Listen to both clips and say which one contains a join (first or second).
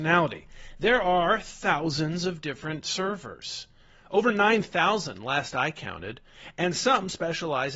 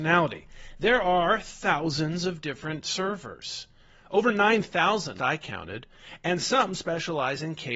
second